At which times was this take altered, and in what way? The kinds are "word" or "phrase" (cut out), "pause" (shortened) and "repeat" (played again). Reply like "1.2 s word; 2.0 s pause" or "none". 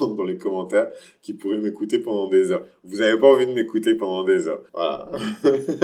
4.7 s pause